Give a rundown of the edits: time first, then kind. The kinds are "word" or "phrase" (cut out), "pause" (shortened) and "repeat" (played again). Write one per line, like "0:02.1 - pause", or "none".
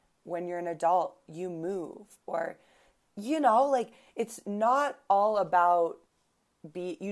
none